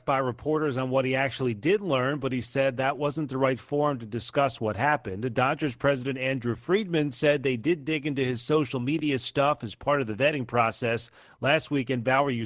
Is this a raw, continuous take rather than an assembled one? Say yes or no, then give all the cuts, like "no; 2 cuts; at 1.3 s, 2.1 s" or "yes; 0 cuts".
yes; 0 cuts